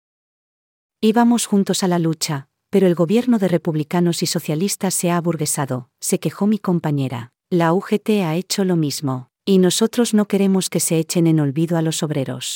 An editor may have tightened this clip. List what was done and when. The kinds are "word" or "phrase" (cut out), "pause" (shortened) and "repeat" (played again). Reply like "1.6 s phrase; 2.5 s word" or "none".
7.4 s pause; 9.3 s pause